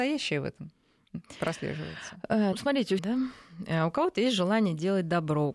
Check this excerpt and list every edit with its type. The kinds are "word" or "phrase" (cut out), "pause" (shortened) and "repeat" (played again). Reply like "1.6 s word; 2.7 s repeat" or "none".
2.5 s word; 3.0 s phrase